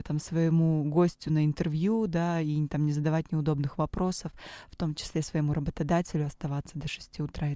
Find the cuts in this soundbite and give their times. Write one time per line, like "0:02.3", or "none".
none